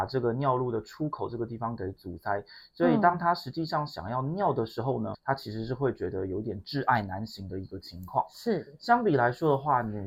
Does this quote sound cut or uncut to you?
cut